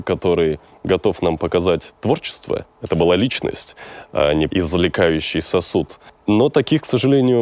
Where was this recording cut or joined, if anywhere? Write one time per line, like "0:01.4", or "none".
0:04.5